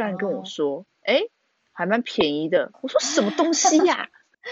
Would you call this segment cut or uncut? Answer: cut